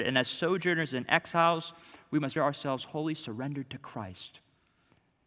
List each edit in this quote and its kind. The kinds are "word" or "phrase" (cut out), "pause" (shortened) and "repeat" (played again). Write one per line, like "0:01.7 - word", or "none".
0:02.4 - word